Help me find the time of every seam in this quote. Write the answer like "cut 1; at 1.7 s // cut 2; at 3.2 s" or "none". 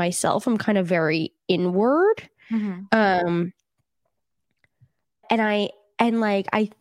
cut 1; at 5.2 s